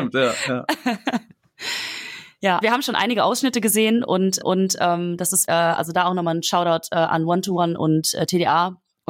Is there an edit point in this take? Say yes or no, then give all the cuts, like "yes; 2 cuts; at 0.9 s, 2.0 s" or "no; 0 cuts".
yes; 3 cuts; at 2.6 s, 4.4 s, 5.5 s